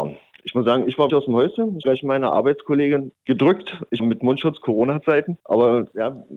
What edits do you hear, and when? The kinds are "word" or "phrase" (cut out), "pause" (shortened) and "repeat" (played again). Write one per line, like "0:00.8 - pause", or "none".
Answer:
0:01.1 - word
0:01.8 - word
0:04.0 - phrase